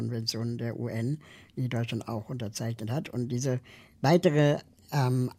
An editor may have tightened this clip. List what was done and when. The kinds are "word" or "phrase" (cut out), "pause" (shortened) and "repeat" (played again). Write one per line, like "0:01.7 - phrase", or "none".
none